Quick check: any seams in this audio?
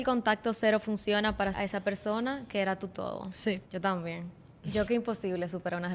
yes; 3 cuts; at 1.5 s, 3.7 s, 4.9 s

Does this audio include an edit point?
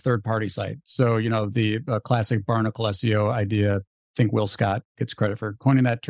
no; 0 cuts

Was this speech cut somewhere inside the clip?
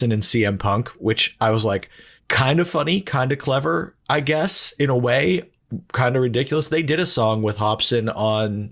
no; 0 cuts

